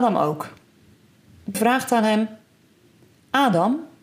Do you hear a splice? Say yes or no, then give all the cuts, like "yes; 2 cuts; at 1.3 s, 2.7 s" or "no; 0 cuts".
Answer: yes; 1 cut; at 1.5 s